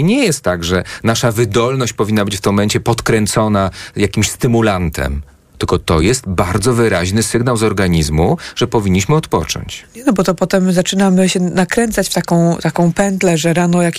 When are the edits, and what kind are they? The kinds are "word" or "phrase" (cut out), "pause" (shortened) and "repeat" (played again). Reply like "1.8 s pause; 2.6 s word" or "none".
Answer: none